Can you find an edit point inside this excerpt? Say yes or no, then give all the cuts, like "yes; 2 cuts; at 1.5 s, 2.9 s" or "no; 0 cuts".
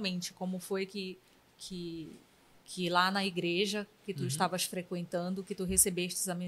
no; 0 cuts